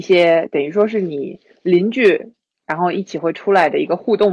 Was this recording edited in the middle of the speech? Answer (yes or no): no